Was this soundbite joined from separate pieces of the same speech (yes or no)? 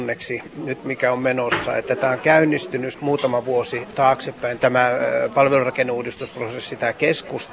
yes